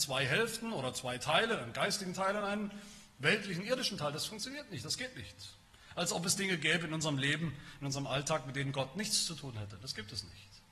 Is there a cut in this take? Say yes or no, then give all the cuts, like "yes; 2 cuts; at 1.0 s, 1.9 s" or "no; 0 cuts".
no; 0 cuts